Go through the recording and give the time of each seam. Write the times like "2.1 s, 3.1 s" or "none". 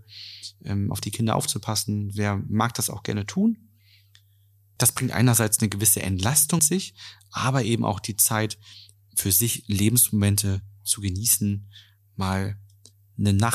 6.6 s

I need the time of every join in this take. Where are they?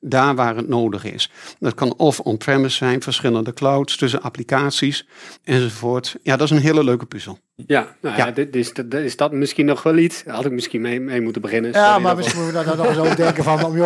5.4 s

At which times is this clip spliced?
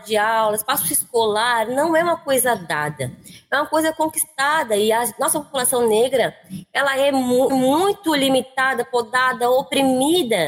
7.5 s

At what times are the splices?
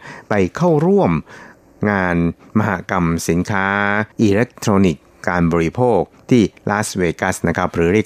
4.1 s

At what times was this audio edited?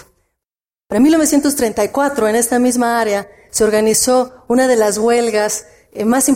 none

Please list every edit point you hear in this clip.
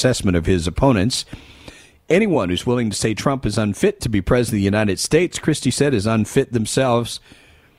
none

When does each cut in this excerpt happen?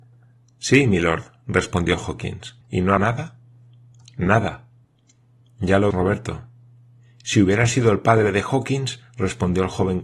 2.6 s, 3.0 s, 4.8 s, 5.9 s

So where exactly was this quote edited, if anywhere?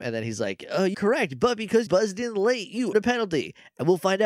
0.9 s, 1.9 s, 2.9 s

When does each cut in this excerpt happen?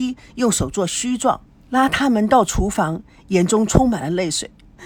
1.5 s

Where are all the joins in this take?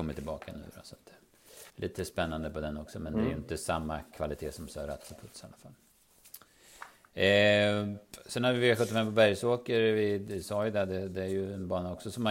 1.7 s

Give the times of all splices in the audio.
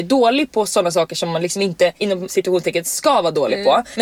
none

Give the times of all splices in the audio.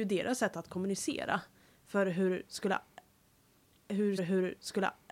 4.2 s

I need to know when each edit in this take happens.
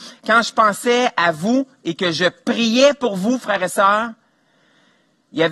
none

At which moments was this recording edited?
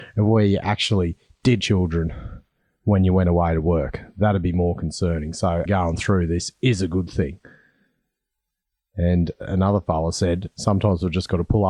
1.6 s, 5.7 s

